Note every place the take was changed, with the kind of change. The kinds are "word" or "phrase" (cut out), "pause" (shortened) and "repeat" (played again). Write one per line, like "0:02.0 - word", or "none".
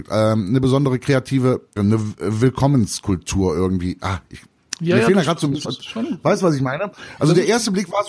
0:01.8 - word
0:05.7 - word